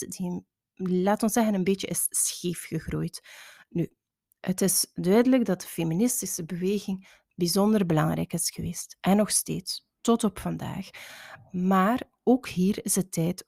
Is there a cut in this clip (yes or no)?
no